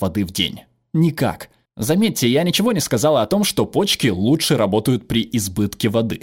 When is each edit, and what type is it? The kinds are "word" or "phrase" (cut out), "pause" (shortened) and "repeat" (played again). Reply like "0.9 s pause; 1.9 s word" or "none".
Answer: none